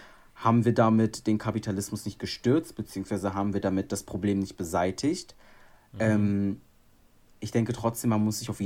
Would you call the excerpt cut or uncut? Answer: uncut